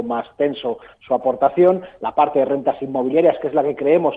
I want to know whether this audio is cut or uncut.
uncut